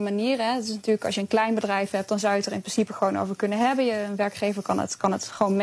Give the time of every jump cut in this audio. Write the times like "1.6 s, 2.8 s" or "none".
none